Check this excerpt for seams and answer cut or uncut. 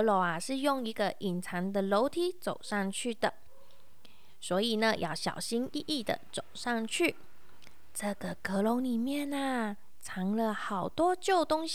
uncut